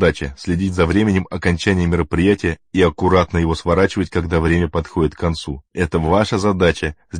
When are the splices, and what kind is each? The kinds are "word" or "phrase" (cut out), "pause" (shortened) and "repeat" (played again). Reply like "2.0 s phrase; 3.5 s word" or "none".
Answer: 5.7 s pause